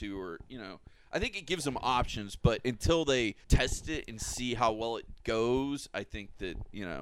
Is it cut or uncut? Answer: cut